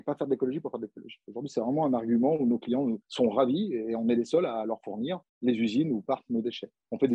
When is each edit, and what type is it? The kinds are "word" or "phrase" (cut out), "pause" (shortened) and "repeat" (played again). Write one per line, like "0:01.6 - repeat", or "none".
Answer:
0:03.0 - pause
0:05.3 - pause